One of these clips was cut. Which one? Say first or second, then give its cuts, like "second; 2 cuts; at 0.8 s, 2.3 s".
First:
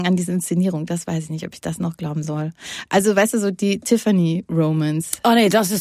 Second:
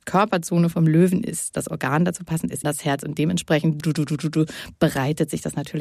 second; 2 cuts; at 2.6 s, 3.8 s